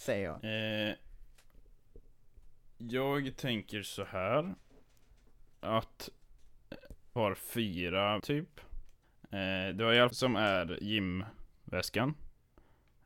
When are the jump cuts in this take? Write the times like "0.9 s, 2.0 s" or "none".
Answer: 7.2 s, 8.2 s, 9.0 s, 10.1 s